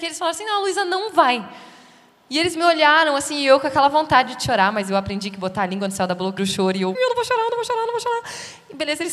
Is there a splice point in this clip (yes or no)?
yes